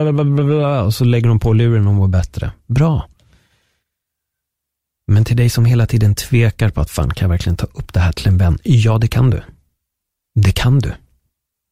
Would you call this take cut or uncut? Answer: uncut